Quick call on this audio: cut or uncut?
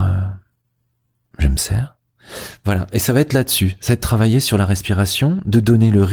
uncut